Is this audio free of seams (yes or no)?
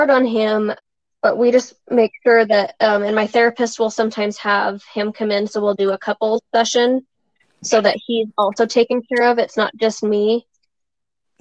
yes